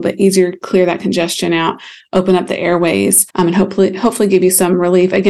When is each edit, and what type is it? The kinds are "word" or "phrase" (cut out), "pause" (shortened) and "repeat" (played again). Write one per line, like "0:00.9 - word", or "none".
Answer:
0:03.3 - pause